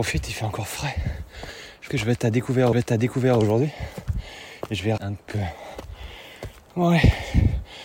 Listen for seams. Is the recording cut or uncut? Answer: cut